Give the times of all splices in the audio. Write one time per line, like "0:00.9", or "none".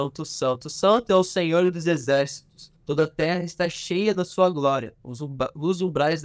0:02.8
0:05.0